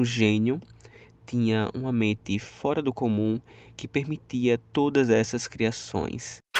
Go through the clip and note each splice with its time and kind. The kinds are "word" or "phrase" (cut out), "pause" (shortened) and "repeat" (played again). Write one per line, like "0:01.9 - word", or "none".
none